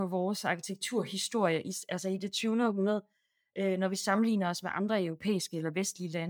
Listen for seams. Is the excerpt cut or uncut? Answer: uncut